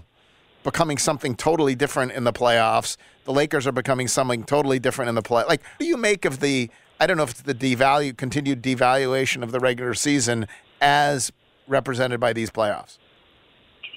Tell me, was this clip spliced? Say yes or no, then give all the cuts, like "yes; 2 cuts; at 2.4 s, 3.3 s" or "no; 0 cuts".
yes; 1 cut; at 5.8 s